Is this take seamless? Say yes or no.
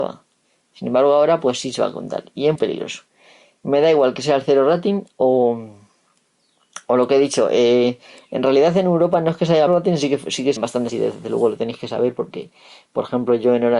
no